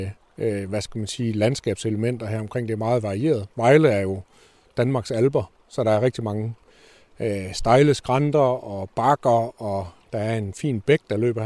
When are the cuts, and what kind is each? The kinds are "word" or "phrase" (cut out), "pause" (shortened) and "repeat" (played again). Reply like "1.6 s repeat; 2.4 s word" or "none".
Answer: none